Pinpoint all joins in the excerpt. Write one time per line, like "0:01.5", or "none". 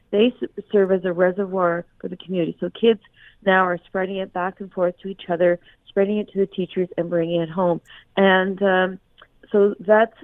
none